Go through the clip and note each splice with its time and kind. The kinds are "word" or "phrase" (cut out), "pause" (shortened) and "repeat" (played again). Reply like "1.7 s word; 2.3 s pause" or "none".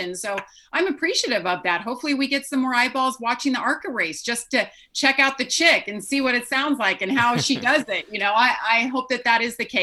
none

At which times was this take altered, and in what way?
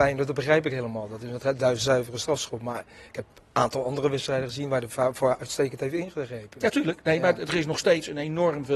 none

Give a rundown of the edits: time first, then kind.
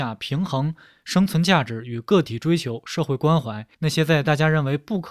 3.7 s pause

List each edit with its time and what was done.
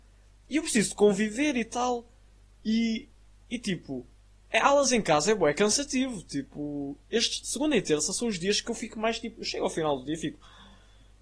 none

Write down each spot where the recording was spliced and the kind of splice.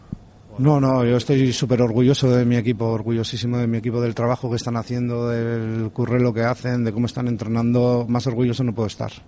none

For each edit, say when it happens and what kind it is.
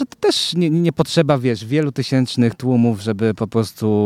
none

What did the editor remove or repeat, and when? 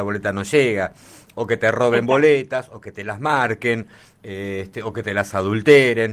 none

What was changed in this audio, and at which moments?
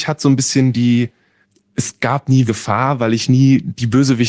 1.4 s pause; 2.5 s phrase

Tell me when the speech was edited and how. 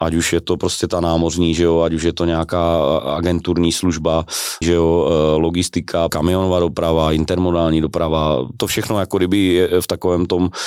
4.6 s phrase; 6.1 s phrase

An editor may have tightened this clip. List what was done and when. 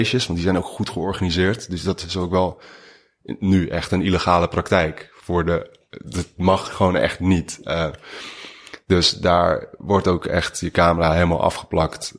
none

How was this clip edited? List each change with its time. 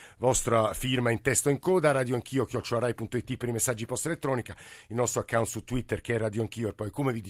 none

